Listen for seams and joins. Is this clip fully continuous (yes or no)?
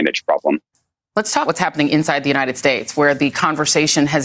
no